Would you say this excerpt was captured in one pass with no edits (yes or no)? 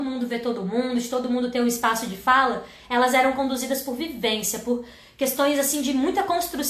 yes